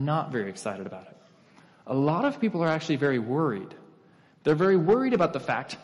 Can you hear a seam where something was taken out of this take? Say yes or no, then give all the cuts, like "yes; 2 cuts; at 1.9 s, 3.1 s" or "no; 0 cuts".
no; 0 cuts